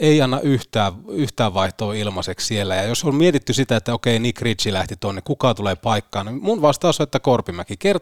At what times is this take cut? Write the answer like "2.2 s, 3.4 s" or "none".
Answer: none